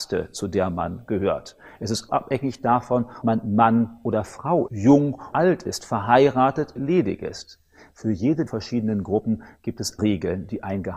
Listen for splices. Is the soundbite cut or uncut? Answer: cut